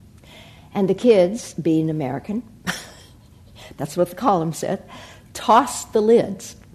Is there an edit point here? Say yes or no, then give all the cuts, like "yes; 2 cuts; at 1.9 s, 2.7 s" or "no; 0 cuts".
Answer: no; 0 cuts